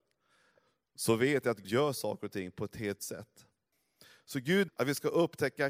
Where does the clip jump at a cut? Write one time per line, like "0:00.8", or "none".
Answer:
0:01.6
0:03.0
0:03.7
0:04.7